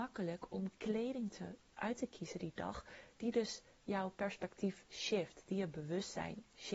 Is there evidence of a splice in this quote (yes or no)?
no